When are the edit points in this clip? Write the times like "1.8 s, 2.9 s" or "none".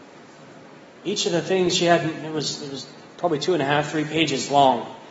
none